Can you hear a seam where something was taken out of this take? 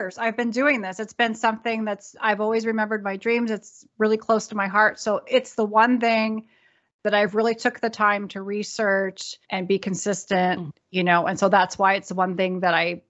yes; 1 cut; at 9.4 s

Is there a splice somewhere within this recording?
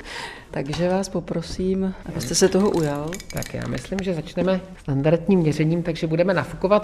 no; 0 cuts

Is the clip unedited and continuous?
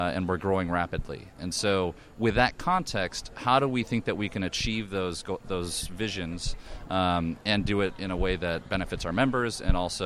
yes; 0 cuts

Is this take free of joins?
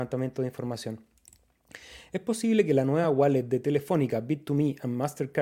yes; 0 cuts

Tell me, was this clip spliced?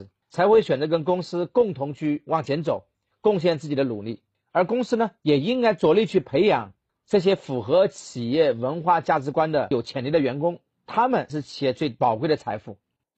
no; 0 cuts

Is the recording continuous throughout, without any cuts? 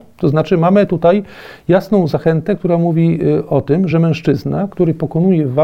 yes; 0 cuts

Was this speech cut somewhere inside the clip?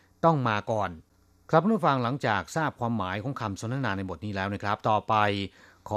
no; 0 cuts

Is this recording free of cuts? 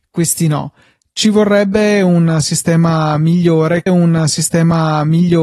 no; 1 cut; at 3.9 s

